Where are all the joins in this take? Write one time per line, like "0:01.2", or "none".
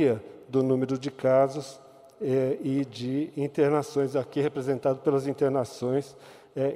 none